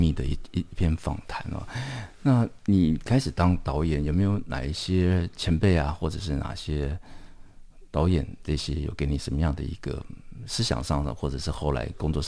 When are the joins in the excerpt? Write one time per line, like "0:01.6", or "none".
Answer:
none